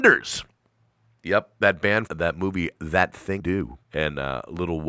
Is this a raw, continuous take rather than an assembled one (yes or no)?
no